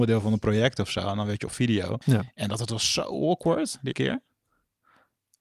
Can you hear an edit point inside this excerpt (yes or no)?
yes